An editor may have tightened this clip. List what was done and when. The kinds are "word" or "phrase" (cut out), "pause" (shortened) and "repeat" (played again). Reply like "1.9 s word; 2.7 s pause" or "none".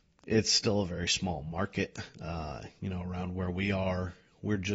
2.1 s pause